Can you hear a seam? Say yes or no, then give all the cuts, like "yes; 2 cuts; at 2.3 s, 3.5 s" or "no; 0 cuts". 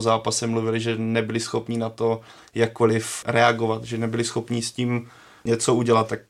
no; 0 cuts